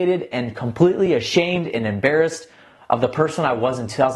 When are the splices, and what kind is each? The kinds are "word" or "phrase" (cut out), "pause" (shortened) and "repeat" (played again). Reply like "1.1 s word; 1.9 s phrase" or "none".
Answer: none